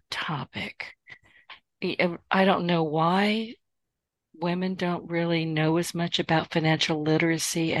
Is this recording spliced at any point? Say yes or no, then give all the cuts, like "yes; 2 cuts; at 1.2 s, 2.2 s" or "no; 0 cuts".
no; 0 cuts